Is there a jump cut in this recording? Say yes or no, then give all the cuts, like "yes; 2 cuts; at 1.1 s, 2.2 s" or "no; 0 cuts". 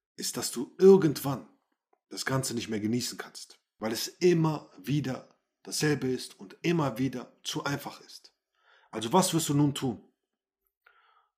no; 0 cuts